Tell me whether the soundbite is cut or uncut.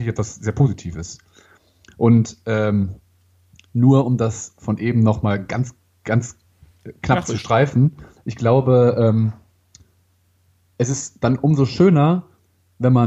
uncut